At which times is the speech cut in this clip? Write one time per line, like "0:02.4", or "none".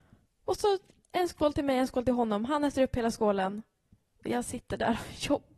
none